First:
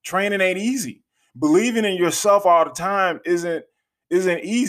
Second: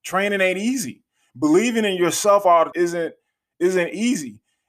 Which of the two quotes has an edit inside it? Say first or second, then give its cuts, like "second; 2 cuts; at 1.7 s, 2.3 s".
second; 1 cut; at 2.7 s